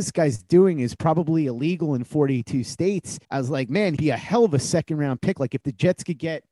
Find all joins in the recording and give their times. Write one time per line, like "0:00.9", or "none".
0:03.2
0:04.0